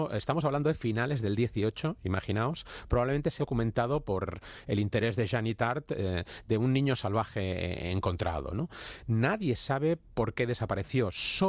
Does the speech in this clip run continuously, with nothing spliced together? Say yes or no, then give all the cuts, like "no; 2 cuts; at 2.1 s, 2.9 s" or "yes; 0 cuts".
no; 1 cut; at 3.4 s